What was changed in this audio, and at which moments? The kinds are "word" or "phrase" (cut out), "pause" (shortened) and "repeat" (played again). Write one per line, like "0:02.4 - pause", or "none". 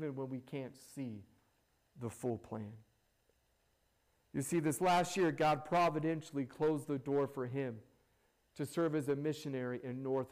none